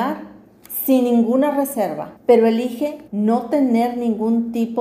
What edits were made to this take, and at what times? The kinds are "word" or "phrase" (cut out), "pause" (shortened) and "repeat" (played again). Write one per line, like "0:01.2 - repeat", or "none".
0:02.2 - pause
0:03.1 - pause